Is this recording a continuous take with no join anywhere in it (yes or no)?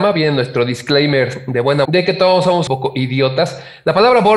no